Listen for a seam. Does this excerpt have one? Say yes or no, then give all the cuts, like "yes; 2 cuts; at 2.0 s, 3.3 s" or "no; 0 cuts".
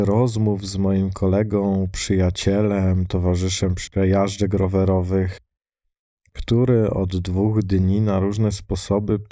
no; 0 cuts